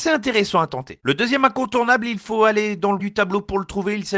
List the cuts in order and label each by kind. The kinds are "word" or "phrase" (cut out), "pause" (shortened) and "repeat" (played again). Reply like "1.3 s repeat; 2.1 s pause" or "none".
3.0 s word